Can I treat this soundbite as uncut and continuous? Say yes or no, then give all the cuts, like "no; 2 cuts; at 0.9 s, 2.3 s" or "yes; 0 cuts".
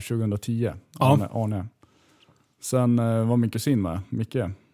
yes; 0 cuts